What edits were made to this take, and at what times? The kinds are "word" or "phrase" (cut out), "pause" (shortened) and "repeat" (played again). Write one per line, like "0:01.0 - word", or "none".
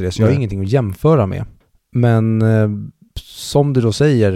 0:01.6 - pause